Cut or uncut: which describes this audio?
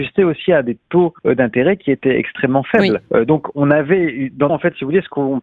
cut